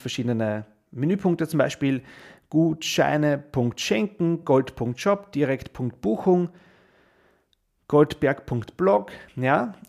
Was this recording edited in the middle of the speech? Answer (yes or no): no